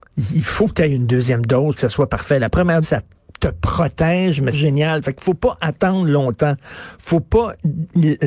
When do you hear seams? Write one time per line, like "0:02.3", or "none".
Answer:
0:01.8
0:02.8
0:04.5